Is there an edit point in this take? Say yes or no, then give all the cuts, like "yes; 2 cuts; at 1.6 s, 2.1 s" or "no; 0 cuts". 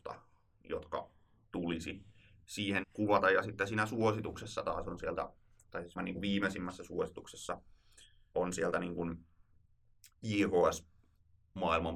yes; 3 cuts; at 2.8 s, 6.0 s, 8.3 s